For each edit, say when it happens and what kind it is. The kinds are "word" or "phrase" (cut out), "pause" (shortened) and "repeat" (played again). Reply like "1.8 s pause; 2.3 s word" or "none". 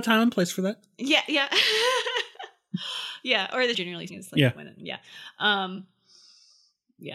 3.7 s word; 4.1 s word